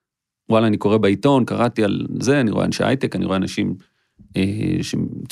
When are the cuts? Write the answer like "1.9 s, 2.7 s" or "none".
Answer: none